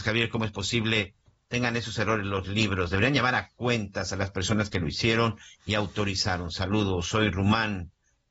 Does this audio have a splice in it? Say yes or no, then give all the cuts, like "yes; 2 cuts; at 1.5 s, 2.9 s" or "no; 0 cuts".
no; 0 cuts